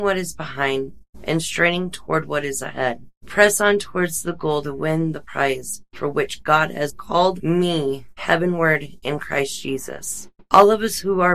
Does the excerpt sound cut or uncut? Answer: uncut